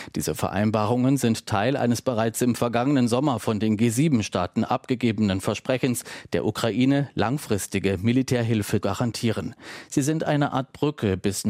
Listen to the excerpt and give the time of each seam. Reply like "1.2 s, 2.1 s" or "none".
8.8 s